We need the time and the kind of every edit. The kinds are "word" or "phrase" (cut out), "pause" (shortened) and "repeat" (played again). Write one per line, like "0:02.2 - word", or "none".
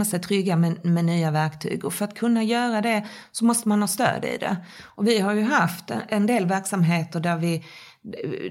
none